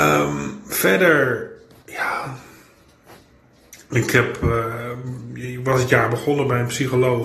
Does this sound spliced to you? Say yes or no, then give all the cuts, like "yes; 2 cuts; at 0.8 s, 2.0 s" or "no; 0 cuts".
no; 0 cuts